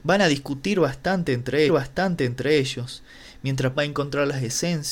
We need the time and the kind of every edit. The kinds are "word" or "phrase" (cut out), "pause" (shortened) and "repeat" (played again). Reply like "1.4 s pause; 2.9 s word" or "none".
1.7 s repeat; 3.7 s word